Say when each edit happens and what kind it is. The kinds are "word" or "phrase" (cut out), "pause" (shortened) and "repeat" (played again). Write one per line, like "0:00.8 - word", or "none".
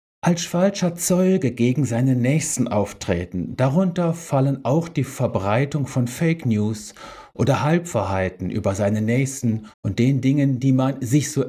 0:09.7 - pause